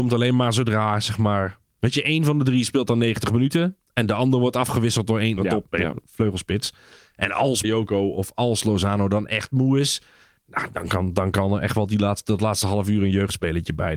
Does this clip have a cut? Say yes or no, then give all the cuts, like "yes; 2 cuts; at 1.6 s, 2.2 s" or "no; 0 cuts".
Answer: yes; 3 cuts; at 5.4 s, 5.7 s, 7.6 s